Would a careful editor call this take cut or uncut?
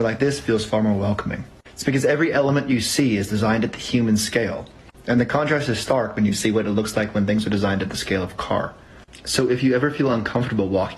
uncut